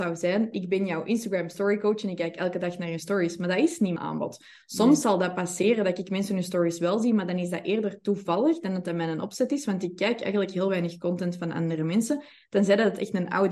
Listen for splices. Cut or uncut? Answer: cut